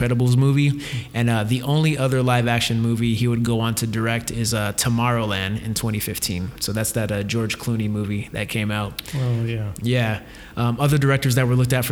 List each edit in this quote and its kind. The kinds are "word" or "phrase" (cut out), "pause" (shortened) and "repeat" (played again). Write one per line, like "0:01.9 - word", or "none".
none